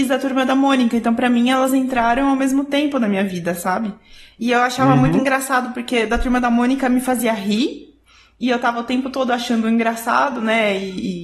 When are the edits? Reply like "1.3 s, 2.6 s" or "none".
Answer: none